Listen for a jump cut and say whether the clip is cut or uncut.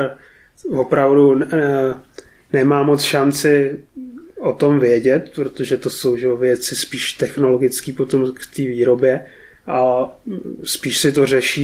uncut